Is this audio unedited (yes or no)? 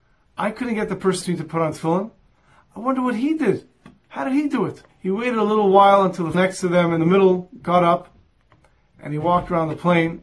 no